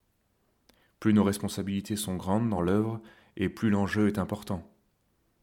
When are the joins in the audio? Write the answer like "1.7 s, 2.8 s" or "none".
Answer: none